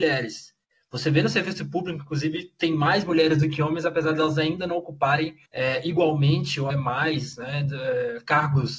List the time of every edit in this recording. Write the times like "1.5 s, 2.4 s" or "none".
5.5 s, 6.7 s

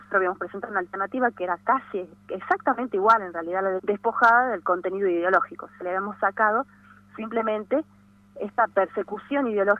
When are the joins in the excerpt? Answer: 3.8 s

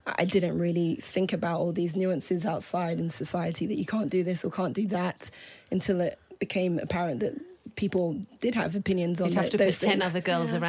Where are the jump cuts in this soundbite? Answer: none

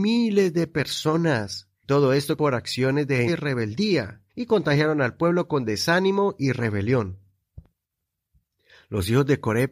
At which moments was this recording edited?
1.8 s, 2.4 s, 3.3 s, 4.3 s

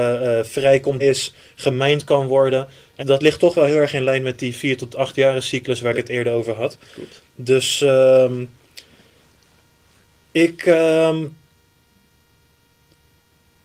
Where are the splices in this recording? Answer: 1.0 s, 3.0 s

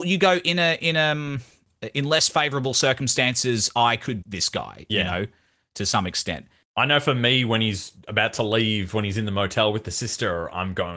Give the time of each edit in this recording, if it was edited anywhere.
4.2 s

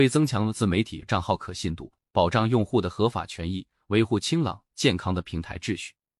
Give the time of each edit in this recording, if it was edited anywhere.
none

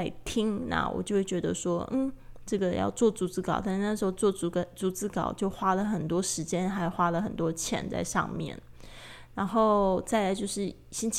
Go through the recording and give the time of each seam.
none

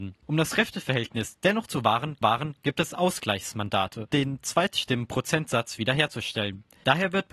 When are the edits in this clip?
2.2 s, 4.1 s

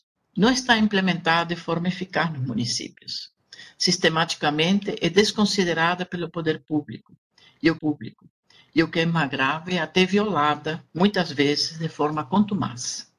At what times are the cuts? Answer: 7.8 s, 10.9 s

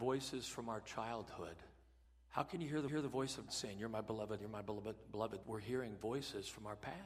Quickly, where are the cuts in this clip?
2.0 s, 2.9 s, 3.5 s, 4.4 s, 5.4 s

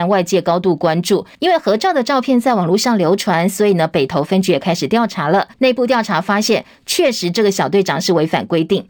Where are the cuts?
1.3 s, 5.5 s

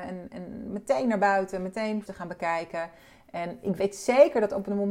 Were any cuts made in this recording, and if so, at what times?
2.1 s

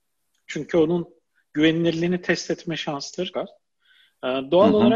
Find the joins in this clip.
3.3 s

